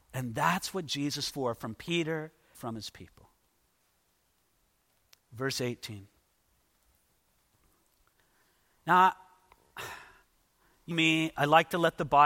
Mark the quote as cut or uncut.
cut